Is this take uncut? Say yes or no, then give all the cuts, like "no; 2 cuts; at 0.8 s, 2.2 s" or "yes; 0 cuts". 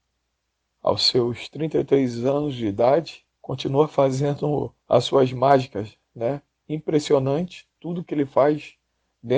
no; 2 cuts; at 3.3 s, 4.8 s